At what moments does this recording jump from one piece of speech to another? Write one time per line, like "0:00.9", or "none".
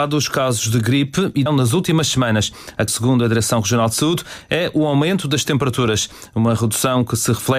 0:01.5
0:02.9